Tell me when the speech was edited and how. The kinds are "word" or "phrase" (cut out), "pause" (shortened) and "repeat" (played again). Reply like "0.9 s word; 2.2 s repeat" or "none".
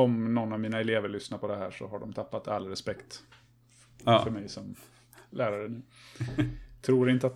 none